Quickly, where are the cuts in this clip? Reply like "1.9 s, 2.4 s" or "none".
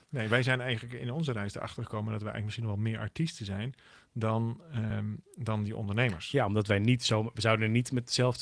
none